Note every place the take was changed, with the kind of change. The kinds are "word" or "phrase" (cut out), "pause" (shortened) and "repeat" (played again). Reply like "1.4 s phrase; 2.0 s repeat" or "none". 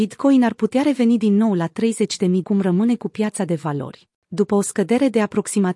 2.4 s phrase; 4.2 s pause